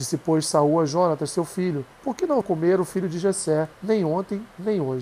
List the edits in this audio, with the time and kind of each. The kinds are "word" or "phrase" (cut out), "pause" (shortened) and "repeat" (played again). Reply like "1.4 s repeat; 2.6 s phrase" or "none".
1.9 s pause; 2.4 s phrase; 3.7 s pause

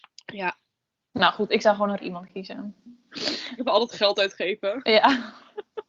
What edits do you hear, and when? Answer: 2.0 s word; 3.6 s word

